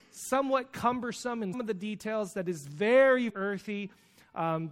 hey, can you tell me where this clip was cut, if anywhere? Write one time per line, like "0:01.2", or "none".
0:01.5
0:03.3